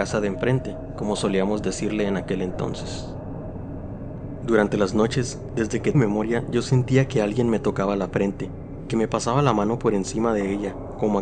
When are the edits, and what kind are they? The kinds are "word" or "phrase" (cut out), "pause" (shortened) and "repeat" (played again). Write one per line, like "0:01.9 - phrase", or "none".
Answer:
0:05.9 - word